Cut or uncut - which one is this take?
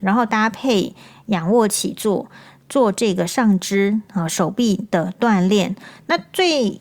uncut